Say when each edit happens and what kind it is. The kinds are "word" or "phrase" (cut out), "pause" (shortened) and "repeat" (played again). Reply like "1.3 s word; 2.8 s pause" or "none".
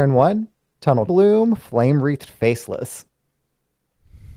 1.1 s phrase